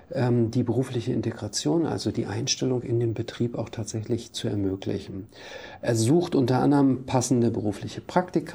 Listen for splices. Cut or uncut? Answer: uncut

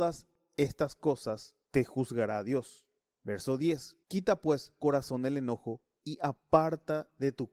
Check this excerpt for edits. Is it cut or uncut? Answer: cut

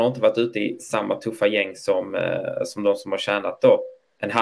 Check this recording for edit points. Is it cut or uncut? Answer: uncut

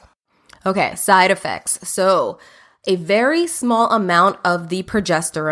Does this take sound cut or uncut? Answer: uncut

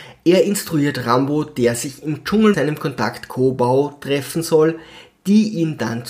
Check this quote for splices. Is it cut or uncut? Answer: cut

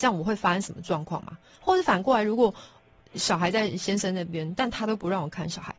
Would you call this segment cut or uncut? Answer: uncut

